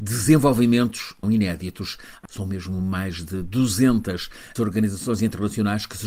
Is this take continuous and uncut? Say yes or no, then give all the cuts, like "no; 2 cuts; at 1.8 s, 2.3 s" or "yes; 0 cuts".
no; 3 cuts; at 1.2 s, 2.3 s, 4.6 s